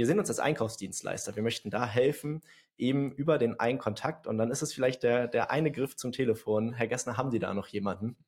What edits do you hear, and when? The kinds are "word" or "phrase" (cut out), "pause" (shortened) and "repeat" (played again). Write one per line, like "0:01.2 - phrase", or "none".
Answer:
none